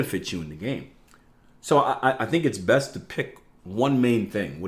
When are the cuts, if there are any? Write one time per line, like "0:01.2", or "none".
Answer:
0:01.1